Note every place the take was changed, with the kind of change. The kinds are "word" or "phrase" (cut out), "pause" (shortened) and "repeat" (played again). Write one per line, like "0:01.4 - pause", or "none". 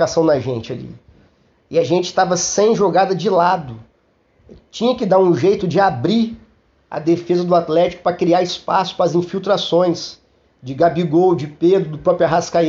none